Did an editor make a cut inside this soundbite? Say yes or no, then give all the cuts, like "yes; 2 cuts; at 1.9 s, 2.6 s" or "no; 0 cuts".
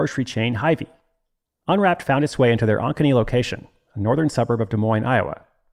no; 0 cuts